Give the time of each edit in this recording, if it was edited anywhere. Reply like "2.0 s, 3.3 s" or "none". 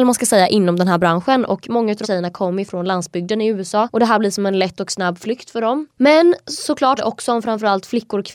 2.0 s, 7.0 s